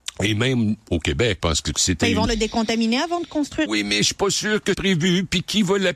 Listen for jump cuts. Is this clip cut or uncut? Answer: cut